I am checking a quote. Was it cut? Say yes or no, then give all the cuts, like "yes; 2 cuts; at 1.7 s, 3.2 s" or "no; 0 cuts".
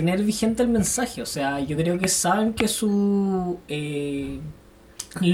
no; 0 cuts